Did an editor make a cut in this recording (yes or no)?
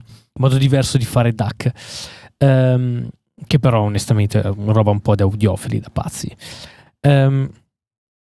no